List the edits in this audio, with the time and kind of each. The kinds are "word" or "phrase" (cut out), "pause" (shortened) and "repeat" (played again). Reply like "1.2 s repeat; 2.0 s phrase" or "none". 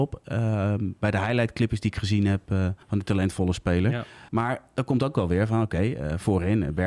2.8 s pause; 4.3 s pause